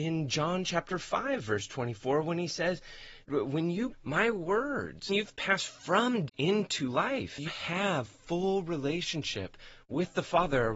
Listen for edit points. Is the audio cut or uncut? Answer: cut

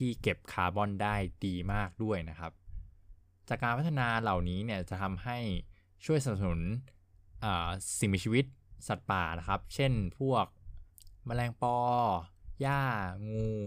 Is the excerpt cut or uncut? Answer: uncut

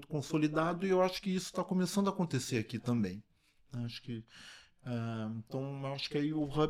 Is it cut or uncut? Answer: uncut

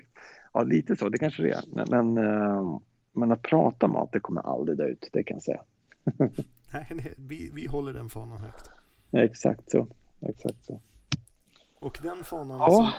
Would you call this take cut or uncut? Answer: uncut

